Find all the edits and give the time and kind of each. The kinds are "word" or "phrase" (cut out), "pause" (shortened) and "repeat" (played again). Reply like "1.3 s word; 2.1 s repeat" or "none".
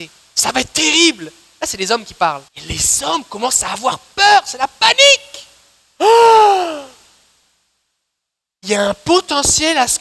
2.5 s pause